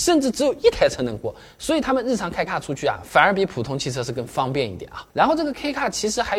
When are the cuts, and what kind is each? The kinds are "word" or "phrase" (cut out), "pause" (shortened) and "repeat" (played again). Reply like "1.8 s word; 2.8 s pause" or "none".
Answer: 2.5 s word; 5.1 s pause